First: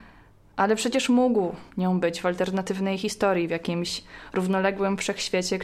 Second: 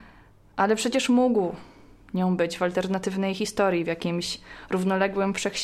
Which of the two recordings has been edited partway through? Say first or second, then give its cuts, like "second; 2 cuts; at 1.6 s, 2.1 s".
first; 1 cut; at 1.7 s